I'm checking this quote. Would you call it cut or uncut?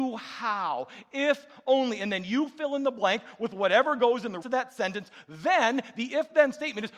cut